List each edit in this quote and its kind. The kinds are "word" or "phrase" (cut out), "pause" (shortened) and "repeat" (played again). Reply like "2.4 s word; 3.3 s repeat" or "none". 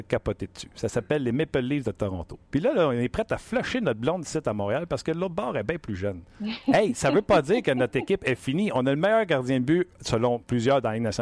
none